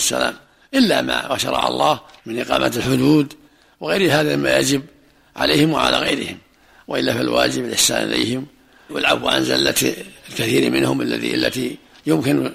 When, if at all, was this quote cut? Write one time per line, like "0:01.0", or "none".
0:10.2